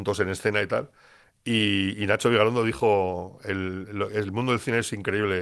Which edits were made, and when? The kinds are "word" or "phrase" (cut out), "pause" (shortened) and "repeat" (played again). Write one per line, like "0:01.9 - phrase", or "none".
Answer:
none